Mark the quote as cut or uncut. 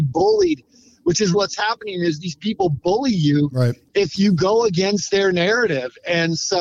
cut